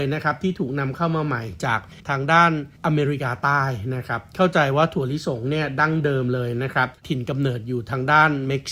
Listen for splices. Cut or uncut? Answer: cut